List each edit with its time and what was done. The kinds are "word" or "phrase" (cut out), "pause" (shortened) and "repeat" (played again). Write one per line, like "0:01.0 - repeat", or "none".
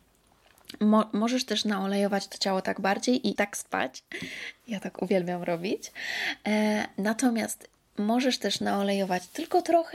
0:03.4 - word